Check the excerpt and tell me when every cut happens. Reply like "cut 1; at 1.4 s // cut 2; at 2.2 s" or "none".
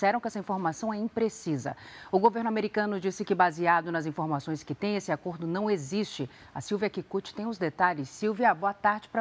none